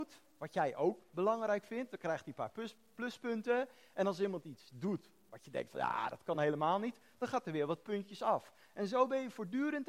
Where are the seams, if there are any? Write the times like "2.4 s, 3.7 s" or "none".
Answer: none